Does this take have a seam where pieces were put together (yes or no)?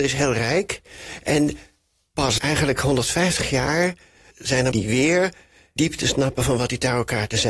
yes